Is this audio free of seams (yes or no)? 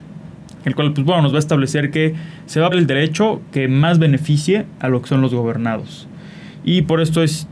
no